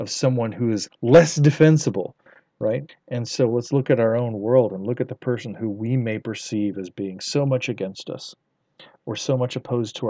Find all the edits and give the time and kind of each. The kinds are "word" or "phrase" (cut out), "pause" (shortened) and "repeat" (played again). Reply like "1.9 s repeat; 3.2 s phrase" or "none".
2.9 s pause